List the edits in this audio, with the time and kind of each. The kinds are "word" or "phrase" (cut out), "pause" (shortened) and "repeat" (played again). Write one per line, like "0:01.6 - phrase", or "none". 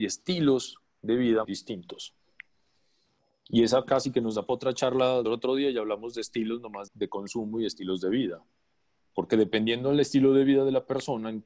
0:01.4 - word
0:05.2 - word
0:06.9 - word